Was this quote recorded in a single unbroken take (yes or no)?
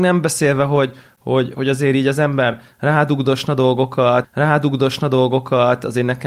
no